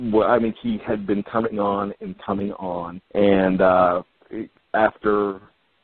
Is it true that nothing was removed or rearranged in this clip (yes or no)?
no